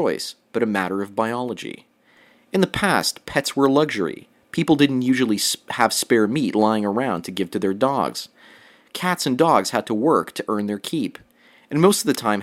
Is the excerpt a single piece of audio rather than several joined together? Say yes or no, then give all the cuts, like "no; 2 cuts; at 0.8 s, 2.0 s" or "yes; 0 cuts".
yes; 0 cuts